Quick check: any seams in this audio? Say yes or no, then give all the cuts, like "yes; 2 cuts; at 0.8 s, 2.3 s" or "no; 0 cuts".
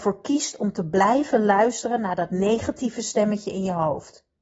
no; 0 cuts